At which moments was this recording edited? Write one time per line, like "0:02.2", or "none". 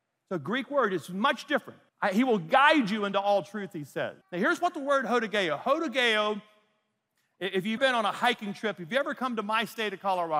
0:01.9
0:04.2
0:07.8